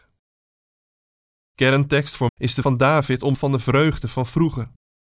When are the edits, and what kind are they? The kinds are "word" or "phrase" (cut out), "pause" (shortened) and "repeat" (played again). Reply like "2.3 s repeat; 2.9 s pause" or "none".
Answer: 2.3 s word; 2.6 s word; 3.3 s word